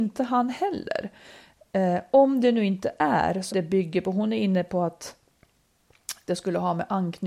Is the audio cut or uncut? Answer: cut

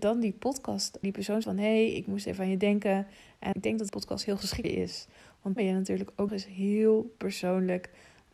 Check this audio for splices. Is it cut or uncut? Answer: cut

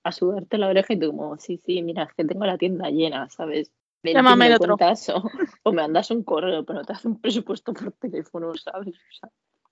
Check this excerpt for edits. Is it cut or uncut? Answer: uncut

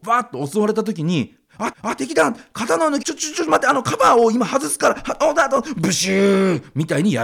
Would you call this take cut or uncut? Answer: cut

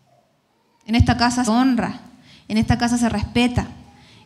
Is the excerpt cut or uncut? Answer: cut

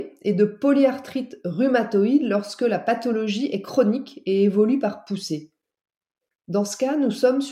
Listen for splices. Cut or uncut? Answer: uncut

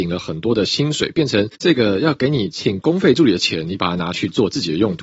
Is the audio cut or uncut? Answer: cut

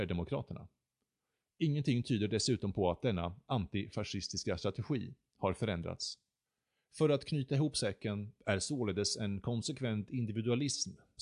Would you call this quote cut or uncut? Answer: uncut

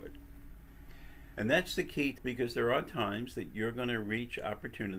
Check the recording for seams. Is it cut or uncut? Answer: cut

